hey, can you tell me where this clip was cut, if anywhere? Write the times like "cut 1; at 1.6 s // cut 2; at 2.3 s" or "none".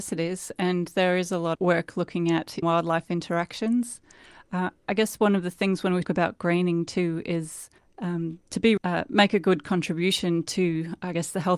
cut 1; at 1.5 s // cut 2; at 2.6 s // cut 3; at 6.0 s // cut 4; at 7.8 s // cut 5; at 8.8 s